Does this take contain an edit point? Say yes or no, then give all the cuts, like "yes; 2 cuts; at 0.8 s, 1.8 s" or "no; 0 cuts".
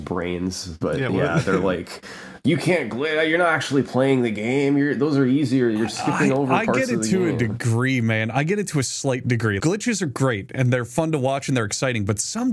yes; 1 cut; at 9.6 s